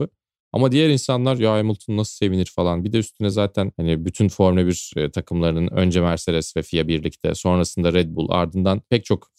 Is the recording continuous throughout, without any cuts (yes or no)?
yes